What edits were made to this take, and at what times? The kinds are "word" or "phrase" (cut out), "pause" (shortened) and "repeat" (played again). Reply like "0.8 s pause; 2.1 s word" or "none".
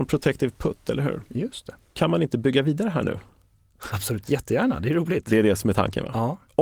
none